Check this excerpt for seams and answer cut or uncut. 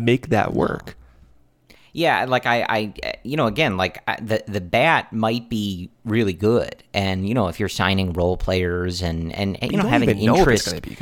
uncut